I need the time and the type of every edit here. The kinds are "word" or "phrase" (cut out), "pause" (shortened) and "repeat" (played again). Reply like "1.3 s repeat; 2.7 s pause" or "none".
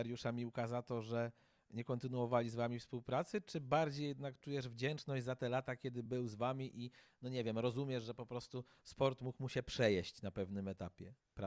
none